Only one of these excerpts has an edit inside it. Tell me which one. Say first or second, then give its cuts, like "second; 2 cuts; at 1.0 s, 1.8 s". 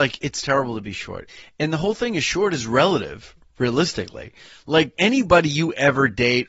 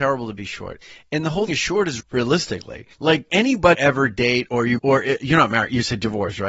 second; 5 cuts; at 1.5 s, 2.0 s, 2.9 s, 3.7 s, 4.8 s